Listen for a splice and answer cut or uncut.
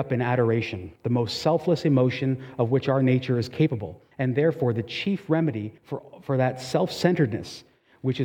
cut